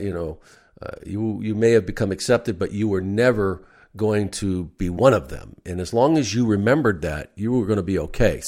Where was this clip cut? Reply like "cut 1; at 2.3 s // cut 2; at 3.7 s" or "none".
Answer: none